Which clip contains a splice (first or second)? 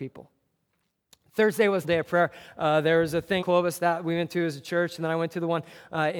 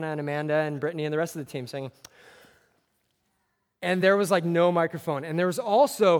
first